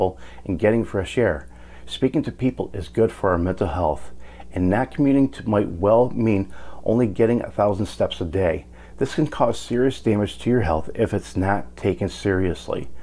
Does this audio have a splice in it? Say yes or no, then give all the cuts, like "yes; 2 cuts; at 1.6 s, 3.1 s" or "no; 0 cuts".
no; 0 cuts